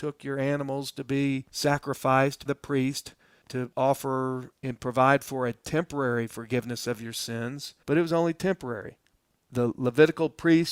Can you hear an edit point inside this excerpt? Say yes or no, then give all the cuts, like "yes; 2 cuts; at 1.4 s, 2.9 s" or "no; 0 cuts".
yes; 2 cuts; at 2.5 s, 7.8 s